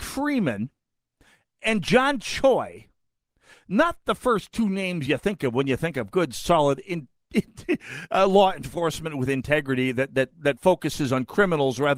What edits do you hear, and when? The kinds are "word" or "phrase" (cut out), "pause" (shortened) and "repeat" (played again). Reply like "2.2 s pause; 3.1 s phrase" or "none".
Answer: none

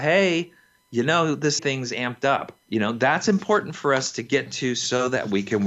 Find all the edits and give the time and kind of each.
1.6 s word; 2.6 s pause

